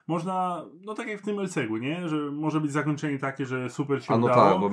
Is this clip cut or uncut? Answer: uncut